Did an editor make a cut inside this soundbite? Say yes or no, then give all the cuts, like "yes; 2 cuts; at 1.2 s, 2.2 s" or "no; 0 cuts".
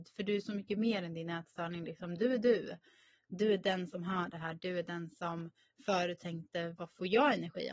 no; 0 cuts